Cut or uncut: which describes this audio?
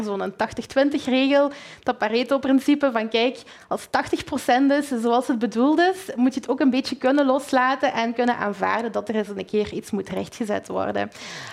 uncut